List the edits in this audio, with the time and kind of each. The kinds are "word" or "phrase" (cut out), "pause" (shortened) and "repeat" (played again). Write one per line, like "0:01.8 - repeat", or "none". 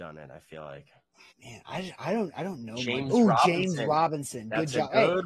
0:01.3 - pause

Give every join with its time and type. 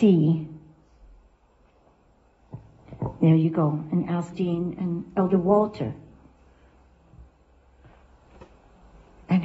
0:04.3 - word

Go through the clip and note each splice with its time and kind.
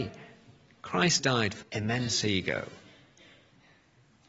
0:01.2 - word
0:01.6 - word

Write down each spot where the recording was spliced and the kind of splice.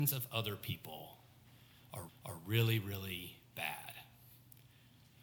0:02.1 - repeat

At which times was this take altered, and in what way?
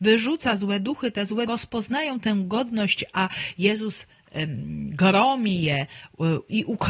0:01.5 - word

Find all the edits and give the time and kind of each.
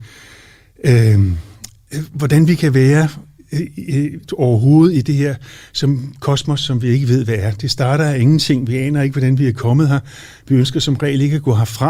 none

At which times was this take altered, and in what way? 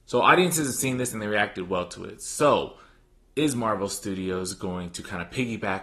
none

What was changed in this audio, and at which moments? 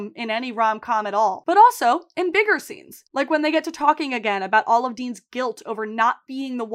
none

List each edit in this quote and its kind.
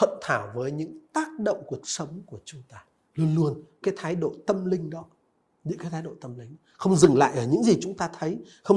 0:01.8 - phrase
0:03.1 - pause
0:03.8 - word

